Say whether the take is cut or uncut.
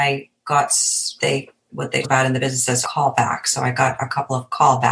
cut